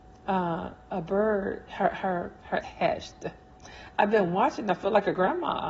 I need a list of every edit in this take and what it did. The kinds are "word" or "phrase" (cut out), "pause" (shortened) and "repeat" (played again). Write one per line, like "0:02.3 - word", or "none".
0:01.7 - word
0:02.6 - word